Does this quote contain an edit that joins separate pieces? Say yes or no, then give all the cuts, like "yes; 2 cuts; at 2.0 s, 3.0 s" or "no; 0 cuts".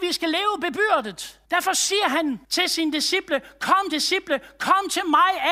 yes; 3 cuts; at 1.4 s, 2.4 s, 3.9 s